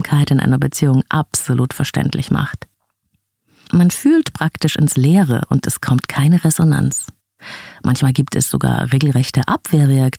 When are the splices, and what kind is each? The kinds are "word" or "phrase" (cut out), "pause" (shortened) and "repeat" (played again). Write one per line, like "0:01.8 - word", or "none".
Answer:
none